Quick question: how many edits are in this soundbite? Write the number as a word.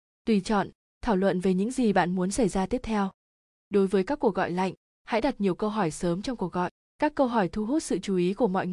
zero